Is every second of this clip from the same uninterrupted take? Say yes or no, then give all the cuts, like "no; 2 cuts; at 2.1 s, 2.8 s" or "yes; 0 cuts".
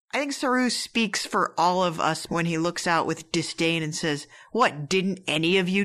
no; 1 cut; at 2.3 s